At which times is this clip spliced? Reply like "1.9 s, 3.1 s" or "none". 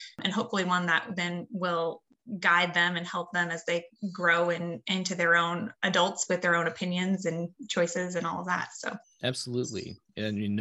9.0 s